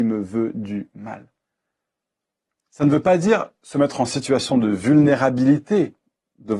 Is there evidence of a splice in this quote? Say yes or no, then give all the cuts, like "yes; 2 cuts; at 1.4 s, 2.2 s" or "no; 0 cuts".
no; 0 cuts